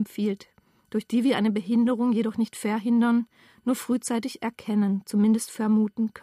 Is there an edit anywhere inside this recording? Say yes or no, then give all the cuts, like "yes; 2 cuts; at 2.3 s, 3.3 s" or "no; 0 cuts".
no; 0 cuts